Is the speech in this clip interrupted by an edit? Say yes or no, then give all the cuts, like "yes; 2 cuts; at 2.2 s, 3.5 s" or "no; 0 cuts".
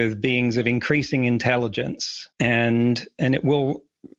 yes; 1 cut; at 2.3 s